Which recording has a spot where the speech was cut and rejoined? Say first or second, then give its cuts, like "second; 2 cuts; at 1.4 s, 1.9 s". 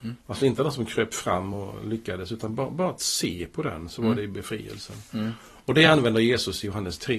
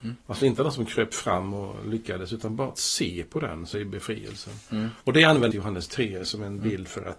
second; 4 cuts; at 2.7 s, 3.7 s, 5.0 s, 5.5 s